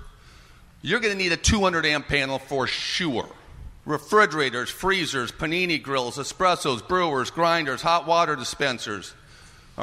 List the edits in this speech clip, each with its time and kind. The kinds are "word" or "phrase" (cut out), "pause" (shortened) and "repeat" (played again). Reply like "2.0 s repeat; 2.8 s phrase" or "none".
3.8 s pause

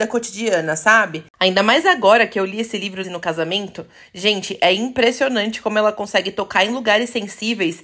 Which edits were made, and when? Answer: 3.0 s phrase

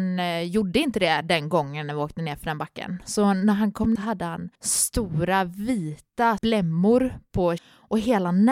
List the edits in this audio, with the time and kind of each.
4.0 s phrase; 4.6 s pause; 6.4 s word; 7.6 s word

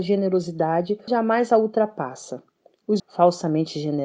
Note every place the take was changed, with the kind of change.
1.1 s word; 3.0 s word

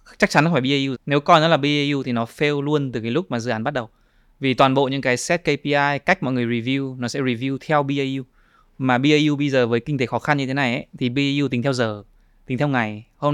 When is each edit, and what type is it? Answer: 0.9 s word

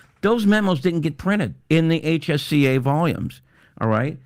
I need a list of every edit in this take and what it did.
1.6 s pause

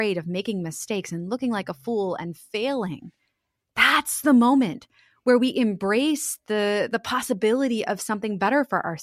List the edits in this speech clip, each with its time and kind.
none

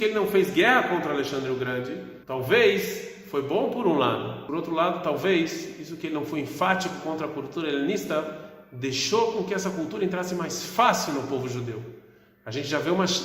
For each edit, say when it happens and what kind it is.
2.2 s pause

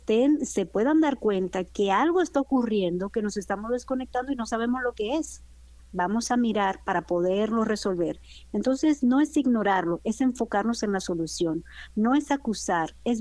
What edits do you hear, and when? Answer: none

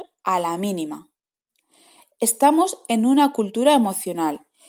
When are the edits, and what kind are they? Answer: none

